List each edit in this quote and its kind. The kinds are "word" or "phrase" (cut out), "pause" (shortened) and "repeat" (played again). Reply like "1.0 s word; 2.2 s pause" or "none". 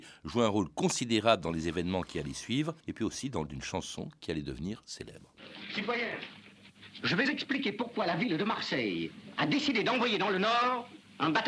2.8 s pause; 3.5 s word; 7.2 s word

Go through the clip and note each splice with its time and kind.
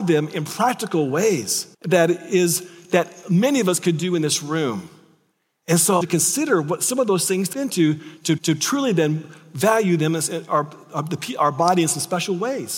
1.7 s pause; 6.0 s phrase; 7.5 s word; 8.4 s repeat

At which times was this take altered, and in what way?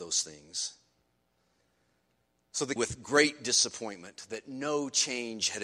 2.8 s word

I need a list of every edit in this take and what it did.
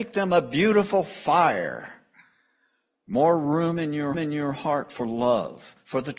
4.1 s repeat

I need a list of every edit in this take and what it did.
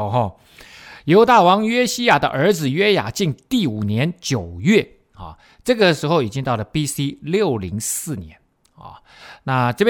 none

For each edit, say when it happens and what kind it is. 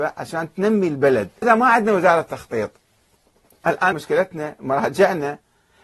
1.4 s word; 3.9 s word

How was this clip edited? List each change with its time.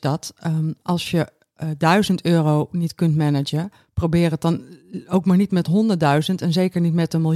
none

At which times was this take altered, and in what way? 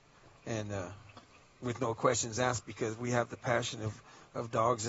none

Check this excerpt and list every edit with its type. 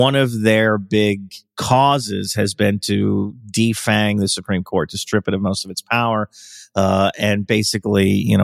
1.4 s pause

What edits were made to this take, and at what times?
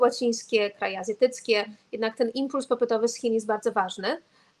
none

